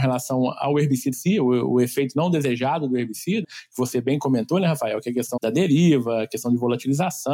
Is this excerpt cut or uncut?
cut